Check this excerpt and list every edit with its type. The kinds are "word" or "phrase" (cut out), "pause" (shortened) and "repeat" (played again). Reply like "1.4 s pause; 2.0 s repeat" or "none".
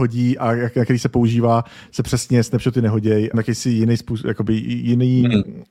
3.3 s phrase